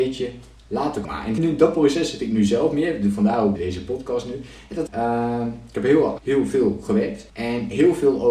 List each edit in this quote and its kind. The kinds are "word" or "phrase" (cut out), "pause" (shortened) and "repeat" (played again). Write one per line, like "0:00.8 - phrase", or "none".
0:01.0 - word
0:01.4 - word
0:03.6 - word
0:04.9 - word
0:06.2 - word
0:07.3 - pause